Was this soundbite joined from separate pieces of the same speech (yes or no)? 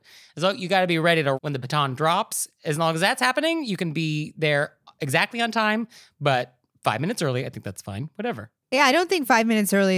yes